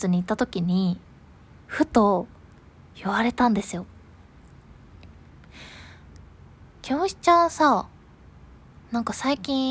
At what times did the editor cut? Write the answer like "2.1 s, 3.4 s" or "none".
none